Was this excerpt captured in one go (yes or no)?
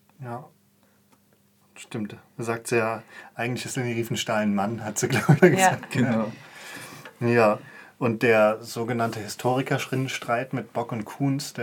no